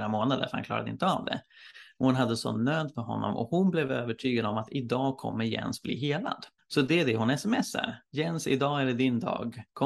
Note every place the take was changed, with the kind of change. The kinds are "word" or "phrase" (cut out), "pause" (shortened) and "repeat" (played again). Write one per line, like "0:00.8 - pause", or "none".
0:06.6 - pause
0:08.0 - pause